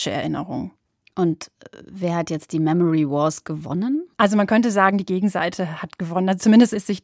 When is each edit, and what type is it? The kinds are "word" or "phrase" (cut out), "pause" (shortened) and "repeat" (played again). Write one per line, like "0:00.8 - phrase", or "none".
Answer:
0:04.1 - pause